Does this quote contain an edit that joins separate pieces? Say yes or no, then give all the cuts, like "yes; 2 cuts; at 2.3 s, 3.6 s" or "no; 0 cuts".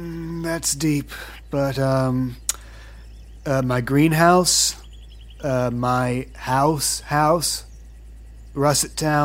no; 0 cuts